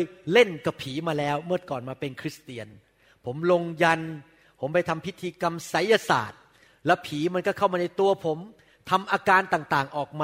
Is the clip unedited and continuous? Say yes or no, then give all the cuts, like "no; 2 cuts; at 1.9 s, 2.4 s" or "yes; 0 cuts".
yes; 0 cuts